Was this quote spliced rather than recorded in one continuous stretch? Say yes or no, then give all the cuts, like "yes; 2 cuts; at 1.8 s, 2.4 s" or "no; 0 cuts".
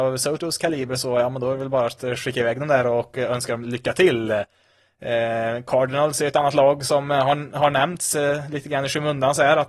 no; 0 cuts